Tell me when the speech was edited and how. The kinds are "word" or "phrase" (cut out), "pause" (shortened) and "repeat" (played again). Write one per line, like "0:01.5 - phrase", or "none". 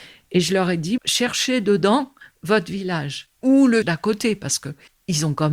0:01.0 - word
0:03.4 - pause
0:03.8 - word